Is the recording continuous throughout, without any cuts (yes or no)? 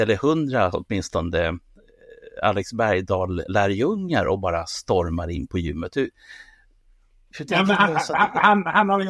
yes